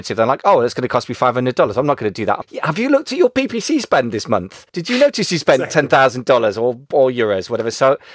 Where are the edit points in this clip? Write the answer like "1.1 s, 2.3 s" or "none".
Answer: 2.4 s, 4.7 s